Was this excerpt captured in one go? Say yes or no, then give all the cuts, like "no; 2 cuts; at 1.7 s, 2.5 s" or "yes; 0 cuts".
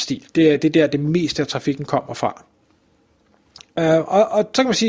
yes; 0 cuts